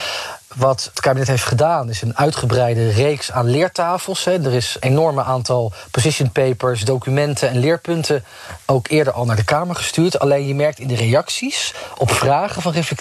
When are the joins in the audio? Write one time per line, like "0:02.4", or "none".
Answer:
0:00.9
0:04.8